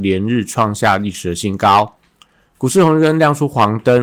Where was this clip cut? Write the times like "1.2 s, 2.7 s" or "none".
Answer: none